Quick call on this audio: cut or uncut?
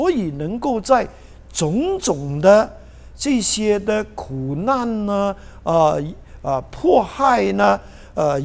uncut